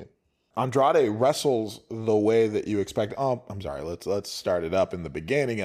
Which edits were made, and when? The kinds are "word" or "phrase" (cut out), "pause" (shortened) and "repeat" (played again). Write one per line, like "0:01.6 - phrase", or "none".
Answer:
none